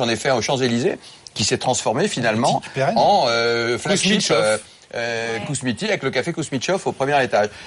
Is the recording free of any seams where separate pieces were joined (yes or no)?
yes